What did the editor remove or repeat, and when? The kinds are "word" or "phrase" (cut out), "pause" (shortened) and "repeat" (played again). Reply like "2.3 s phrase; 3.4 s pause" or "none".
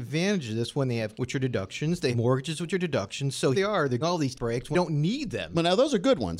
1.1 s word; 2.1 s word; 3.5 s word; 4.0 s word; 4.3 s word; 4.7 s word

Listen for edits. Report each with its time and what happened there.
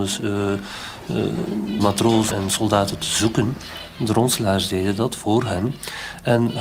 1.8 s word; 2.3 s word

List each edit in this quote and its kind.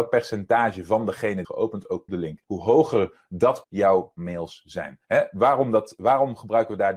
1.4 s phrase; 2.1 s phrase; 2.4 s pause; 3.6 s phrase; 5.0 s pause

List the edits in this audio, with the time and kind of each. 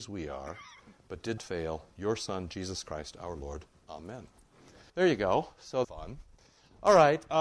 1.4 s word; 4.9 s pause; 5.8 s phrase

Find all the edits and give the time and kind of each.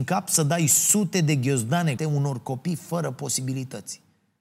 2.0 s phrase

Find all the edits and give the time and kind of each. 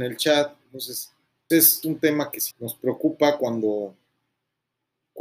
1.5 s word; 1.8 s word; 2.5 s word

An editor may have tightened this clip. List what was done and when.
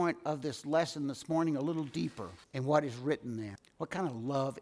2.4 s pause

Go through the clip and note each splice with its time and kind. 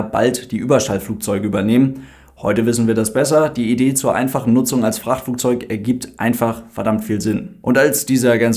none

